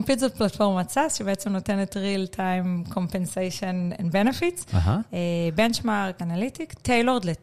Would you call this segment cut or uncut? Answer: cut